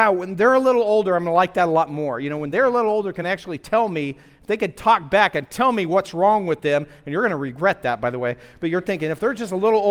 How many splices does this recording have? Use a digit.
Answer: 0